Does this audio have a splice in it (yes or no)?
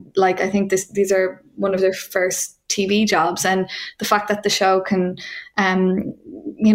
no